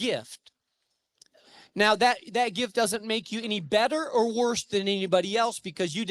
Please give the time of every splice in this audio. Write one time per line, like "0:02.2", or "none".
none